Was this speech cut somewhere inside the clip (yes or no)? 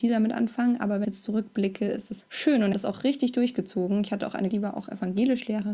yes